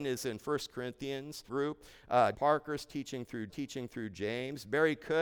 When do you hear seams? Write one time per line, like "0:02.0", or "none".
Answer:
0:01.5
0:02.3
0:03.5